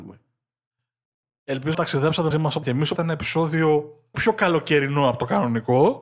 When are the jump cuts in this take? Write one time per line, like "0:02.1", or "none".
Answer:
0:01.7
0:02.3
0:02.6
0:03.0
0:04.1